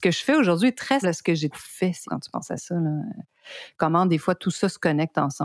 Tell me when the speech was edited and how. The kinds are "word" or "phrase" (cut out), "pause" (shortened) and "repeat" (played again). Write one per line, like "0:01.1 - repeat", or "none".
0:01.0 - word
0:01.5 - word
0:02.1 - word